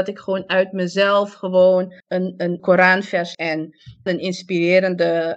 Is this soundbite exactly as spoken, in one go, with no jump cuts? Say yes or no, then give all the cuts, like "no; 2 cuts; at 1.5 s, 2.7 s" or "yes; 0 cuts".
no; 4 cuts; at 2.0 s, 2.6 s, 3.3 s, 4.1 s